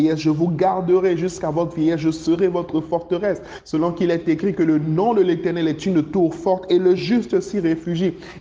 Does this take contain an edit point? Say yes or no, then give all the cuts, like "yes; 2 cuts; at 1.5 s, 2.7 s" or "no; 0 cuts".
no; 0 cuts